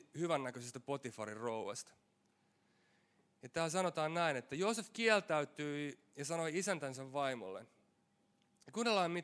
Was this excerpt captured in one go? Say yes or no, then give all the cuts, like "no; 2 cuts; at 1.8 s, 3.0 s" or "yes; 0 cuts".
yes; 0 cuts